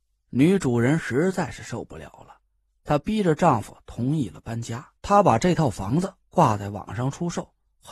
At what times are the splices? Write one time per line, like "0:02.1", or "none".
0:05.0